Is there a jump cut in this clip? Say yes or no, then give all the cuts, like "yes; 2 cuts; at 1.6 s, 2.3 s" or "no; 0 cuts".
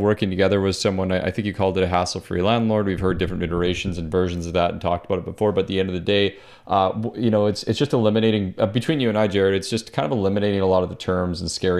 no; 0 cuts